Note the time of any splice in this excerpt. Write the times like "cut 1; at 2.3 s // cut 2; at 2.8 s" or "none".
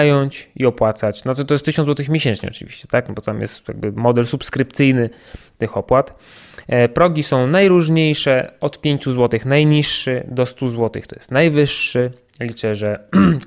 none